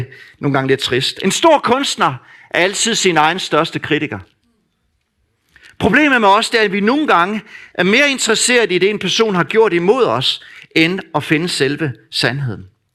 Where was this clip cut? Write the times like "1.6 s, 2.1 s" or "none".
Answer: none